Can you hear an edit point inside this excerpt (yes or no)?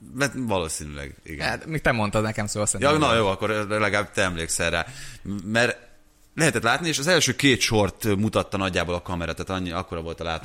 no